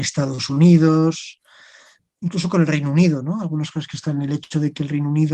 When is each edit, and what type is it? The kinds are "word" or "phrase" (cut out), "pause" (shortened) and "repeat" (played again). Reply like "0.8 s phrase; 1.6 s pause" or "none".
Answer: none